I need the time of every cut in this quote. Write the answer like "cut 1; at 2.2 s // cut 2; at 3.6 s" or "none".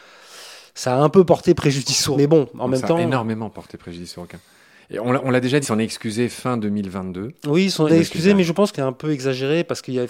cut 1; at 2.1 s // cut 2; at 5.6 s // cut 3; at 7.9 s // cut 4; at 8.7 s